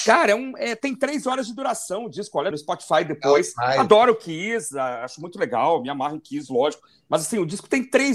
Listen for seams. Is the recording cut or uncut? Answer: cut